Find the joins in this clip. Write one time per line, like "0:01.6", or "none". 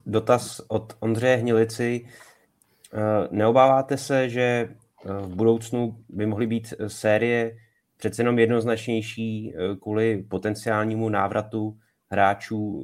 none